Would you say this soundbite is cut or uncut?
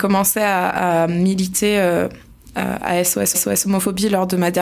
cut